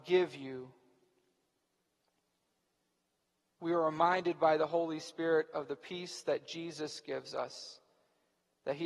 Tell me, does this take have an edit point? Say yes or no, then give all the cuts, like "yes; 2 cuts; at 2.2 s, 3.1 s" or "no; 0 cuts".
no; 0 cuts